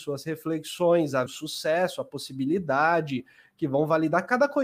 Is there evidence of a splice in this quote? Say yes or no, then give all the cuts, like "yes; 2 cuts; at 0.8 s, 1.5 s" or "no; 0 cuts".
yes; 1 cut; at 1.3 s